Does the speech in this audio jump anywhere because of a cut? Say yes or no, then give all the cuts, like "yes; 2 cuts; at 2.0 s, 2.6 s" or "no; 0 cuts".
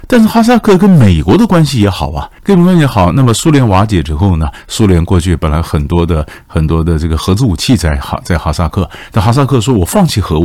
yes; 1 cut; at 2.4 s